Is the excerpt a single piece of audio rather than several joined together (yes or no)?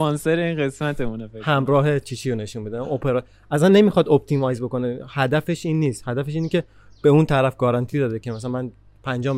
yes